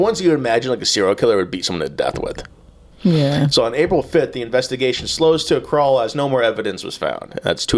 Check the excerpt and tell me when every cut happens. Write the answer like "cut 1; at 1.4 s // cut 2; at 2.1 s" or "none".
none